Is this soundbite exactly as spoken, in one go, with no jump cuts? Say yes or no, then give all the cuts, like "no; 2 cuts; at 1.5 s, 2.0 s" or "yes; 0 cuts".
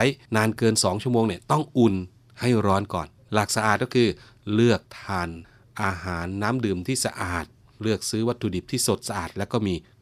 yes; 0 cuts